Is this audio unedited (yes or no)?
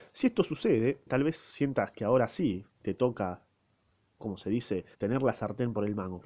no